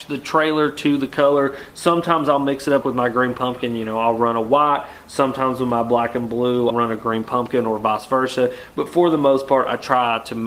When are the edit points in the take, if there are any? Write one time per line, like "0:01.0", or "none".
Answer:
0:02.8
0:06.7